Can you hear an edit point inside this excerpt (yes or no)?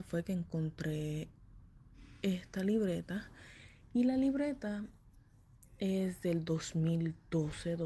no